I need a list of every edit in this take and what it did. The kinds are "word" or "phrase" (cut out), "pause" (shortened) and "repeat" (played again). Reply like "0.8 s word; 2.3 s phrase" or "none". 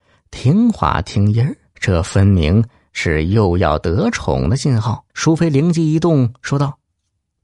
1.7 s pause; 5.1 s pause